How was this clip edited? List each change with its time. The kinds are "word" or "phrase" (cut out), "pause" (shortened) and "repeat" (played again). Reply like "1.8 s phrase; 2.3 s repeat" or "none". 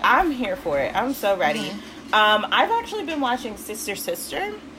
none